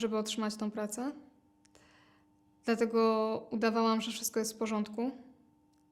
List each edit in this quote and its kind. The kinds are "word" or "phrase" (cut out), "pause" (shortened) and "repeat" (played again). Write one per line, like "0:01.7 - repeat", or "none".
none